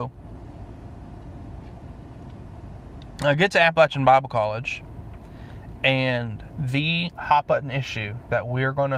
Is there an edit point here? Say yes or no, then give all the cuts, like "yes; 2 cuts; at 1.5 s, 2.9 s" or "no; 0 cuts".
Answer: no; 0 cuts